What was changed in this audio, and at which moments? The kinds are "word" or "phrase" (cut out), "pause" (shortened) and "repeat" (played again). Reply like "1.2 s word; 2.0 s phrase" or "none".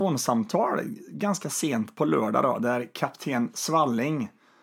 none